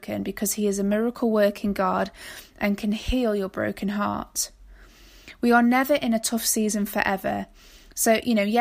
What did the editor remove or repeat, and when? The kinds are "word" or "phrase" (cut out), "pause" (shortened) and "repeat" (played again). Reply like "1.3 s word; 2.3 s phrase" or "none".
none